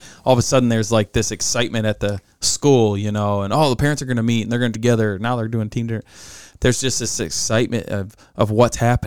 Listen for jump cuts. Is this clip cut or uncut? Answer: cut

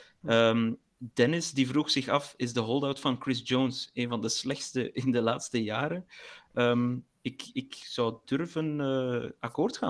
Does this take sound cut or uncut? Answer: uncut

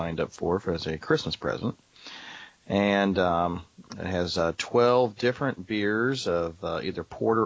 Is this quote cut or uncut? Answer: uncut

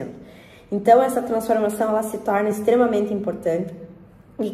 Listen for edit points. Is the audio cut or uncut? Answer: uncut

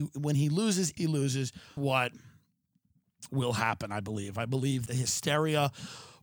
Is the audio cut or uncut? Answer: cut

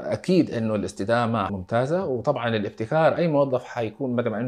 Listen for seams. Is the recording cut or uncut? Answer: cut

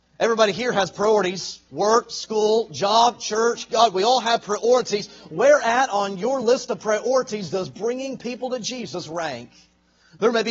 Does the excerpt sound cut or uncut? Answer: uncut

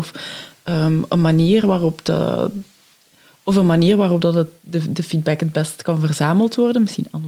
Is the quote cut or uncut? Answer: uncut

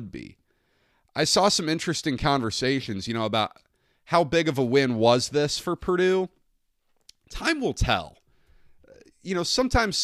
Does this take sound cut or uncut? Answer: uncut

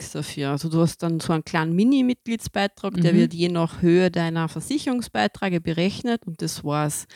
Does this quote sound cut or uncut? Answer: uncut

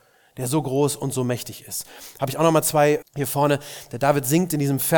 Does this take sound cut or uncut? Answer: cut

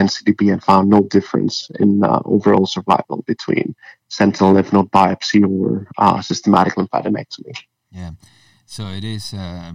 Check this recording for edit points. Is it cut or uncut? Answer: uncut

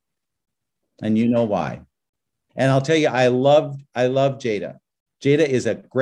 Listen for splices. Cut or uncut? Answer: uncut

